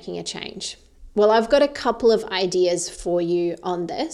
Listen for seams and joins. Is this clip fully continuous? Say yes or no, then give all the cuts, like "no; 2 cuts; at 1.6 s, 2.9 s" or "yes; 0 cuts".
yes; 0 cuts